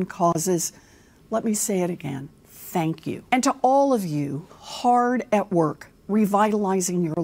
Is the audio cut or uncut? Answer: cut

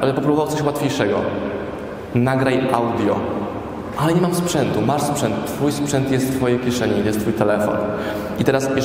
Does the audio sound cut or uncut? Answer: uncut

